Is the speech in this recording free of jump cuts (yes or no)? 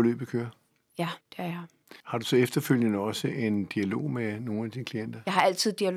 no